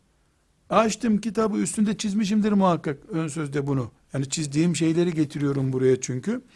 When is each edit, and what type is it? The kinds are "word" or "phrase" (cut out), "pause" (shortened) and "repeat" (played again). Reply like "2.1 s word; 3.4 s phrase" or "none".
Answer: 4.0 s pause

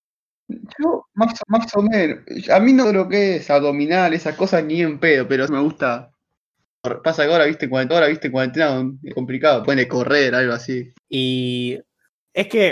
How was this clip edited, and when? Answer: 1.4 s repeat; 2.8 s phrase; 5.5 s word; 7.9 s repeat; 9.1 s word; 9.6 s phrase; 11.0 s pause

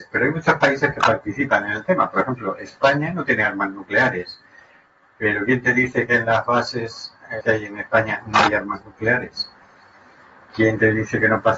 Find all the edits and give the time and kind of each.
7.4 s word

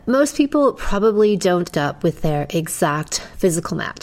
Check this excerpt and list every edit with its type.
1.7 s word

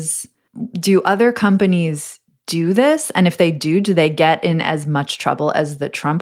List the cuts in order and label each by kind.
none

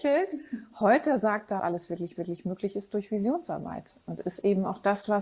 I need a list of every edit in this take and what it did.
1.6 s phrase; 2.2 s repeat; 4.2 s word

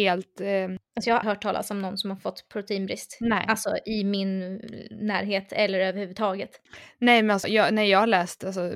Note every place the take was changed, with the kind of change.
1.2 s word; 7.4 s word

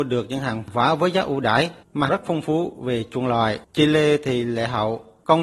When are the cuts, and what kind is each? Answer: 2.1 s phrase; 3.6 s pause

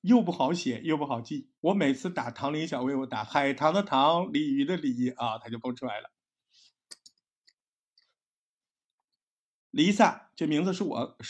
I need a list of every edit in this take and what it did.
1.6 s pause

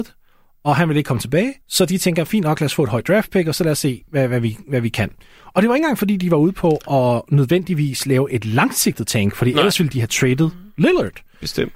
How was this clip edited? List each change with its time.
1.6 s pause

